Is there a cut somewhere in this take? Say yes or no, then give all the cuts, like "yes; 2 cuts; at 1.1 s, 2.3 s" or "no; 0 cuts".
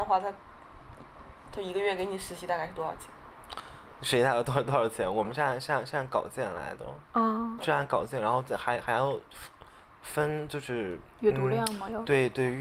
yes; 2 cuts; at 7.1 s, 7.6 s